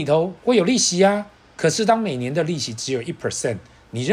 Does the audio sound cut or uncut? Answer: cut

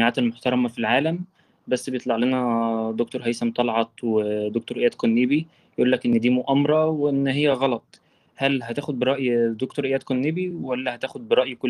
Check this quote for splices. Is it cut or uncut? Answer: uncut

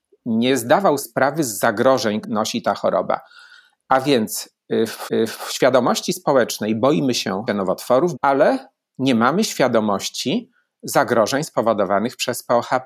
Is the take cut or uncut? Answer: cut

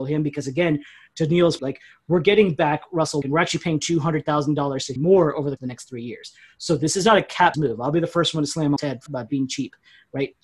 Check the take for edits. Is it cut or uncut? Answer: cut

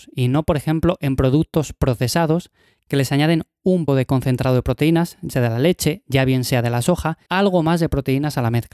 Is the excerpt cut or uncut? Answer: cut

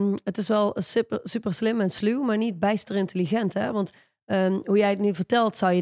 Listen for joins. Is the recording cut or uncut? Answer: uncut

